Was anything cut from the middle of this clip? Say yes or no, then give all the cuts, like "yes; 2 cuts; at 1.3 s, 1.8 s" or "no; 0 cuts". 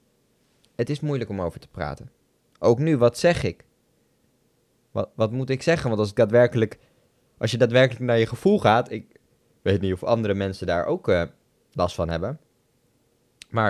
no; 0 cuts